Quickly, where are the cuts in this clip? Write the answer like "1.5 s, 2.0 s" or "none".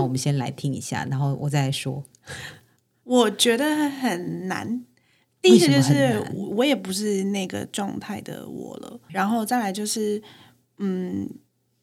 9.1 s

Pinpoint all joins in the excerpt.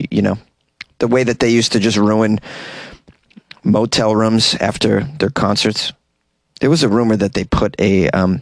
none

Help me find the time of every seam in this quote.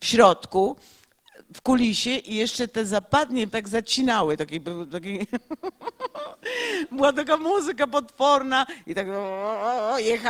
3.5 s

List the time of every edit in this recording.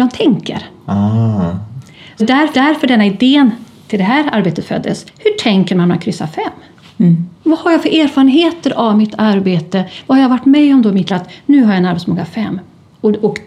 2.2 s, 2.5 s, 5.1 s, 7.4 s, 11.1 s

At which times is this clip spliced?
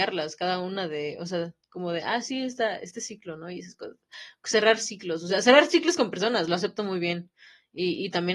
none

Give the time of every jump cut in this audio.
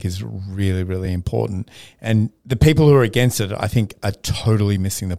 none

